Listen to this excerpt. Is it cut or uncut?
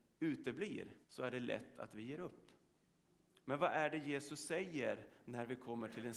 cut